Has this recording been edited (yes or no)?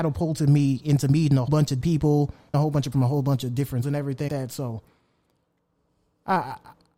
yes